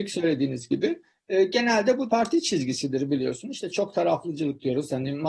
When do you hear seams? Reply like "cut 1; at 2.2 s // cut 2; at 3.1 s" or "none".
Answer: cut 1; at 2.1 s